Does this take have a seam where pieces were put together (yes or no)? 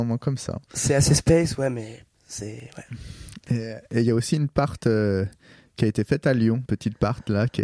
yes